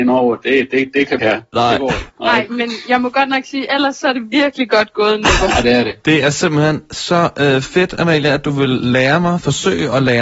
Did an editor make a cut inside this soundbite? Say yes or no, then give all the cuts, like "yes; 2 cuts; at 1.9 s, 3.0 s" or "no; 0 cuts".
yes; 2 cuts; at 1.2 s, 2.1 s